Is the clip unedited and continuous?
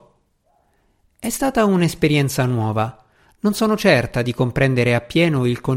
yes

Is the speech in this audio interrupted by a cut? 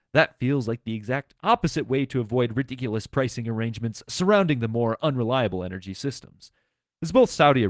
no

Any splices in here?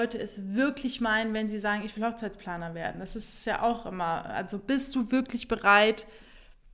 no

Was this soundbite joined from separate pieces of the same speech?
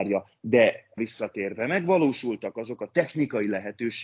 yes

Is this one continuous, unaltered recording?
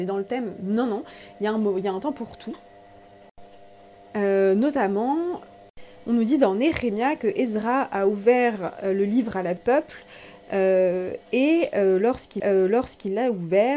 no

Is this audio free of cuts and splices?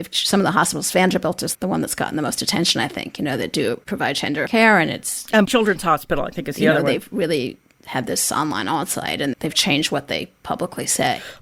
no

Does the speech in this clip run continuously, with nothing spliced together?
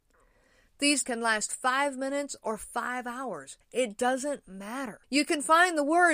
no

